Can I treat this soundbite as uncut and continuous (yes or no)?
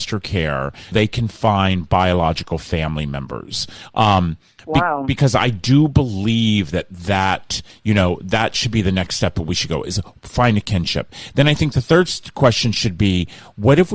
no